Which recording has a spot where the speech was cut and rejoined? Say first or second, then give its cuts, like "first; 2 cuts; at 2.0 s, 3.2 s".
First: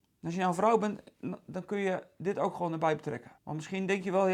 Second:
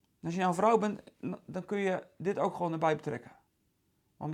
first; 1 cut; at 3.4 s